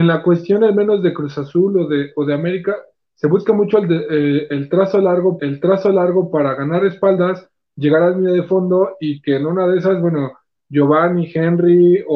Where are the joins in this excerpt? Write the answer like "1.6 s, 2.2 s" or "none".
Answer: 5.4 s